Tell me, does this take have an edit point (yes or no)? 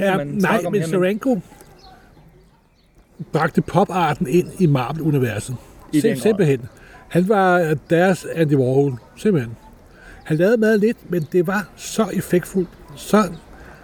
no